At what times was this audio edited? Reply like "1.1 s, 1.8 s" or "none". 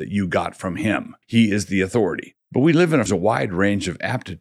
1.2 s, 3.1 s